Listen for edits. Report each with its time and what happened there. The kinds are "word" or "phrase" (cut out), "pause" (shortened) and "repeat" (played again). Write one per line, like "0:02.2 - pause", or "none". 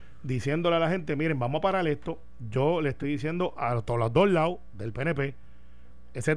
none